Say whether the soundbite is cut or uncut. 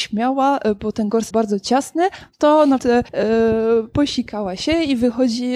cut